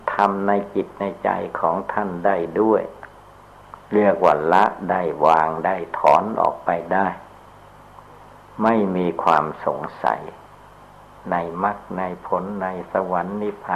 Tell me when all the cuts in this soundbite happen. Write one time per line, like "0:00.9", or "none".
0:03.8